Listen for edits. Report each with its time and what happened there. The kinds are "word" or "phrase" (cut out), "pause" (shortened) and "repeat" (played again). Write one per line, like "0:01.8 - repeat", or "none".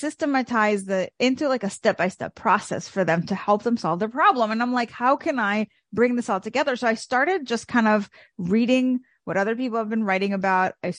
none